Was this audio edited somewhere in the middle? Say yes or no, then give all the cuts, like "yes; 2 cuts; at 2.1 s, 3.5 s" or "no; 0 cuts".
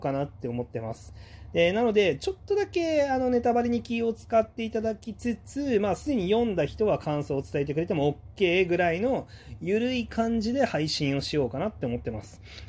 no; 0 cuts